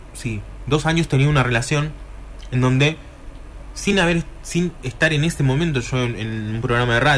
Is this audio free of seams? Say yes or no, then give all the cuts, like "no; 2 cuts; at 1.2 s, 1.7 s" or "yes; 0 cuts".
yes; 0 cuts